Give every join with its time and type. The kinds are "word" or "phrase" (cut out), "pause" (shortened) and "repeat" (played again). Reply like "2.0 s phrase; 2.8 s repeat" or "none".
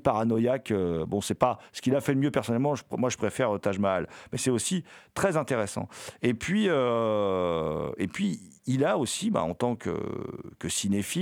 none